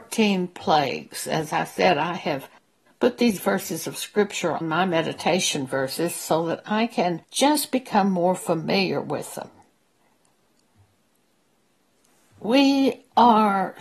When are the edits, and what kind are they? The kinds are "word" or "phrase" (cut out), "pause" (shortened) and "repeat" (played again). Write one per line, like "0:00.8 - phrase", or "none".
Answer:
0:04.6 - word